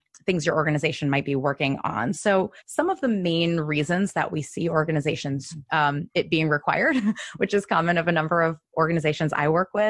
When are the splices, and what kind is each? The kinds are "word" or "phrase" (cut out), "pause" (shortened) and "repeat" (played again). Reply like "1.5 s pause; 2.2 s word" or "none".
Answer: 2.6 s pause; 5.6 s phrase